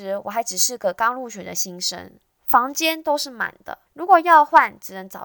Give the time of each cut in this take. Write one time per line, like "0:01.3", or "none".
0:03.9